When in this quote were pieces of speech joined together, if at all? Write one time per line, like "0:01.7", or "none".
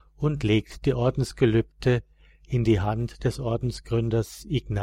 none